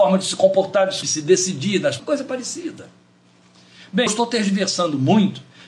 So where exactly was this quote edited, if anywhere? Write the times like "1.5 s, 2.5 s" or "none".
1.0 s, 2.0 s, 4.1 s